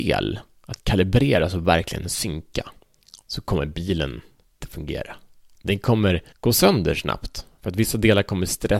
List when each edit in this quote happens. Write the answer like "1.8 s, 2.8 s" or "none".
2.8 s, 4.6 s, 6.3 s